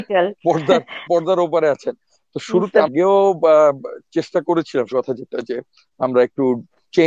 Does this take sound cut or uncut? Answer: cut